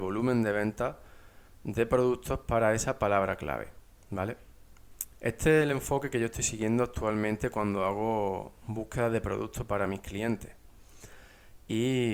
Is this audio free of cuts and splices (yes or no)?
yes